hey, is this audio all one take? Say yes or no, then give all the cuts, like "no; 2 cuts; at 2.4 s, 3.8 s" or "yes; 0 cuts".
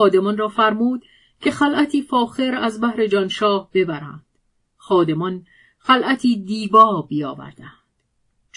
yes; 0 cuts